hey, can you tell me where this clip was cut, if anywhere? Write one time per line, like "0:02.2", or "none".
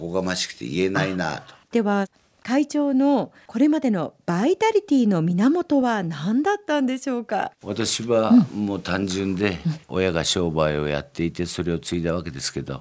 0:01.6
0:07.5
0:09.8